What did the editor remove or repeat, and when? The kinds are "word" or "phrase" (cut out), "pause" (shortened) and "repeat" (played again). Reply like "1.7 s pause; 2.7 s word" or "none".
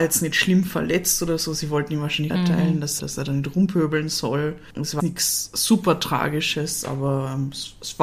2.3 s phrase; 3.0 s word; 5.0 s word

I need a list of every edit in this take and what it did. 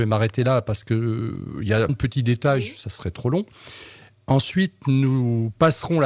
1.9 s word; 4.1 s pause

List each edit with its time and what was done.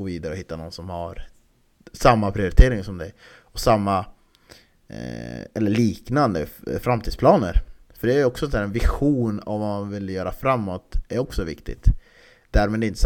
none

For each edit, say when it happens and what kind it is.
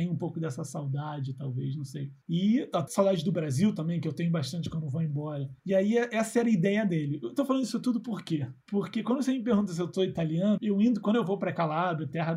2.2 s pause; 2.9 s word; 5.6 s pause; 8.6 s pause; 10.6 s word

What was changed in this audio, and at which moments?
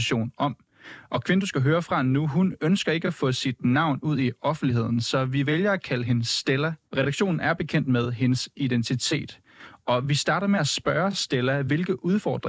6.9 s pause

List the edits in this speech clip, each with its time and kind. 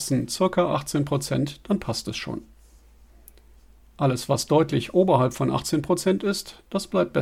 none

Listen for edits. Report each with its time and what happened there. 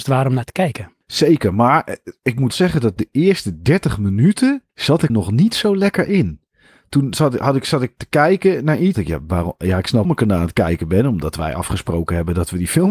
1.0 s pause; 2.5 s word; 4.7 s pause; 5.1 s word; 8.9 s phrase; 10.0 s phrase

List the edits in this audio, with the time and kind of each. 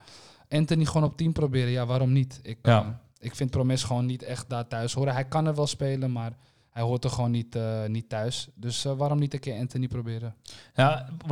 2.6 s word

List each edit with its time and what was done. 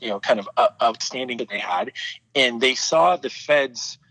1.4 s word

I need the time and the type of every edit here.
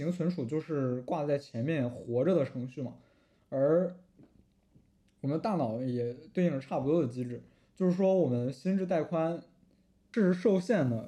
none

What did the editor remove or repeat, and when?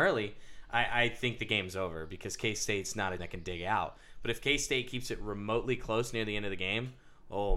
3.2 s word

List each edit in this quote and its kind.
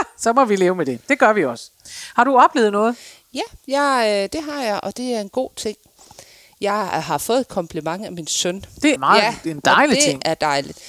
9.0 s word

